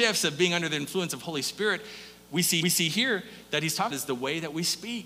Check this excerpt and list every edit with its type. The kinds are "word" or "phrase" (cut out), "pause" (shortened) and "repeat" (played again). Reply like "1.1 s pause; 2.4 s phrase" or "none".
2.6 s repeat; 3.9 s word